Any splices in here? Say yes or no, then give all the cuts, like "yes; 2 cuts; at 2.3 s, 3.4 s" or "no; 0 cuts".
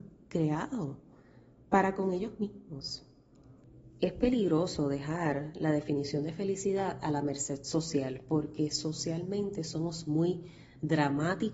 no; 0 cuts